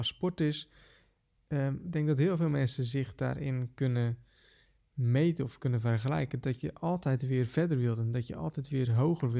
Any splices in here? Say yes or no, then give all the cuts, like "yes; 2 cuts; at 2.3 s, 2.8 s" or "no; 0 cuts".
no; 0 cuts